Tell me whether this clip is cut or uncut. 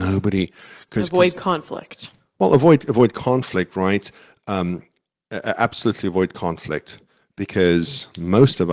uncut